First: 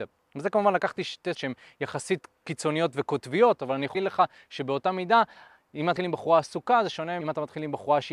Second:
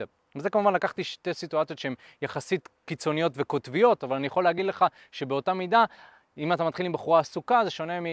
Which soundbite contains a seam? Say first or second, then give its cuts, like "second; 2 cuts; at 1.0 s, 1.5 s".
first; 4 cuts; at 1.3 s, 3.9 s, 6.0 s, 7.2 s